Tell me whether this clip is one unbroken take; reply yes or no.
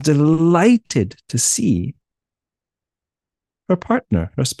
yes